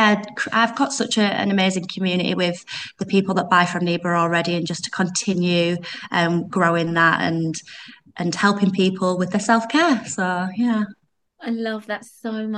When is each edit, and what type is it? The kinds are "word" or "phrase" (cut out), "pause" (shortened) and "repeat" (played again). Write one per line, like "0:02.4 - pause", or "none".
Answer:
none